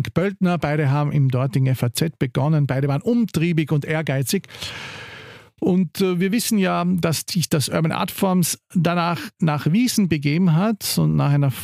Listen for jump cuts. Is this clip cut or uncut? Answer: uncut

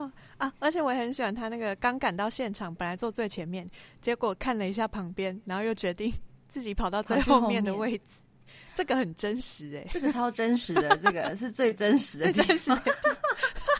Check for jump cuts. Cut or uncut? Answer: uncut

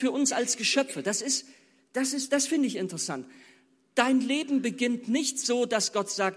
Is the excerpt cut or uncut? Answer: uncut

